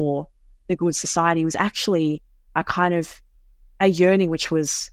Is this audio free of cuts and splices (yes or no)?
yes